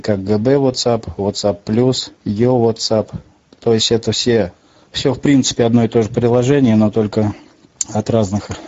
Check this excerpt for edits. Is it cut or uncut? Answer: cut